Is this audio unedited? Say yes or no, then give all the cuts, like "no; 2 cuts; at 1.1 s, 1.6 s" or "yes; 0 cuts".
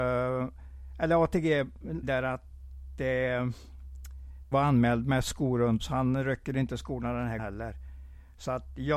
no; 4 cuts; at 2.0 s, 4.5 s, 5.8 s, 7.4 s